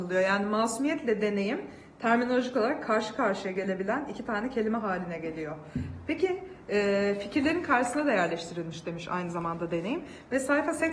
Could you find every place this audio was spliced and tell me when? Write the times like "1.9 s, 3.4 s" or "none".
none